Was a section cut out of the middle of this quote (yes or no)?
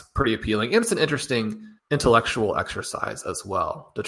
yes